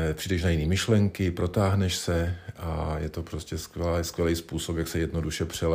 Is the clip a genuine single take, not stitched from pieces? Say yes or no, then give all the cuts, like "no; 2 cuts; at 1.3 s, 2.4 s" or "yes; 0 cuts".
yes; 0 cuts